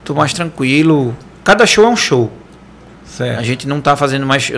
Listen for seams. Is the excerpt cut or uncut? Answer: uncut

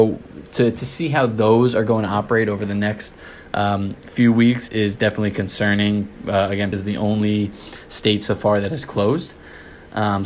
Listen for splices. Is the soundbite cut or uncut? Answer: cut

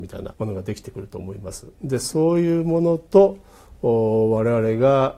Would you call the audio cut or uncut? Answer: uncut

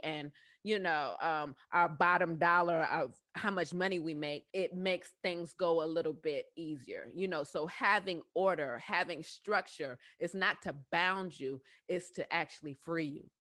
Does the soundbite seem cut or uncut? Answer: cut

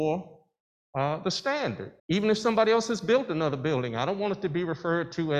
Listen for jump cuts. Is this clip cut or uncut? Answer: cut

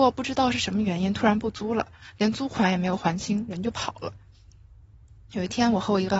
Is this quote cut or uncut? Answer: uncut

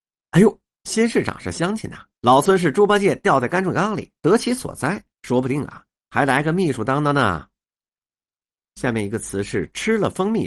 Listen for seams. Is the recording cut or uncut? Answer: cut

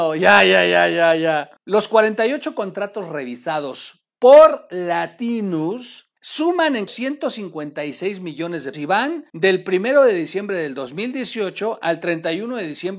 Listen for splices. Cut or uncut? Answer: cut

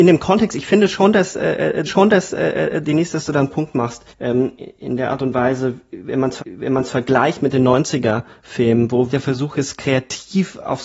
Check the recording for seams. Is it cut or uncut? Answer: cut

